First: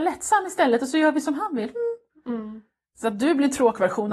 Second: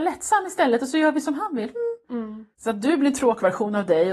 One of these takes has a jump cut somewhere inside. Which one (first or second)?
second